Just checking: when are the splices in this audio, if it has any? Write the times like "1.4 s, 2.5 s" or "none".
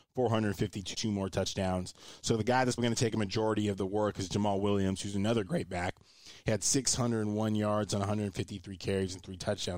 0.9 s, 2.8 s